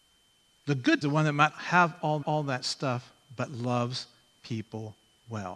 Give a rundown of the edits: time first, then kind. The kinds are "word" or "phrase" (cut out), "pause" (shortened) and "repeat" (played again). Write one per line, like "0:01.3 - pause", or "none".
0:01.0 - phrase
0:01.5 - word
0:02.2 - repeat

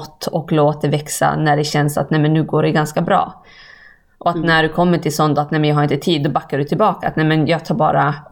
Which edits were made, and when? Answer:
none

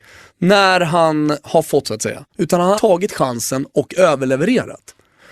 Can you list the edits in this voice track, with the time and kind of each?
0:01.8 - word
0:02.3 - pause
0:02.7 - word

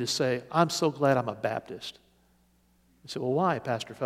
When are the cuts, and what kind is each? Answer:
none

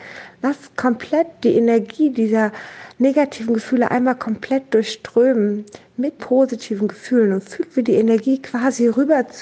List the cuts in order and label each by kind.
0:06.2 - word

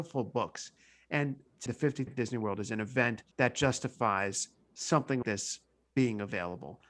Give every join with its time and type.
0:01.7 - word
0:02.1 - word
0:03.3 - pause
0:05.2 - word

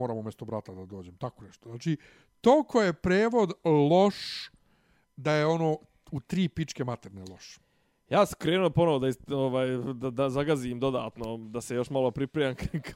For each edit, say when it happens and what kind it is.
none

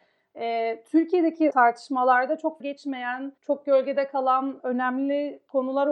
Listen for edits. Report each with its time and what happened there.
0:01.5 - word
0:02.6 - word
0:03.4 - pause
0:04.6 - word

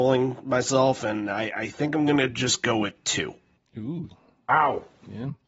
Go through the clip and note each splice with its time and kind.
none

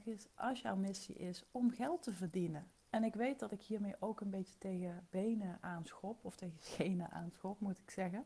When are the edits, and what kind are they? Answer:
0:02.8 - pause

